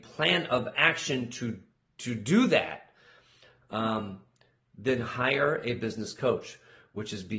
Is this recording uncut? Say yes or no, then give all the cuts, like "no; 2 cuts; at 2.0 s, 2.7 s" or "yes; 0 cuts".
yes; 0 cuts